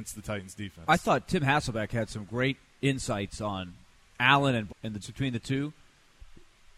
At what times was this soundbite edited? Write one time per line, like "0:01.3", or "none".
0:04.7
0:05.0